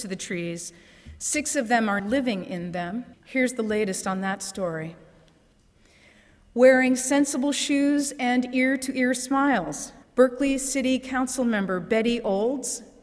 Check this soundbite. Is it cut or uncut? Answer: cut